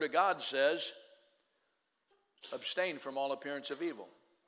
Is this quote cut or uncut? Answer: uncut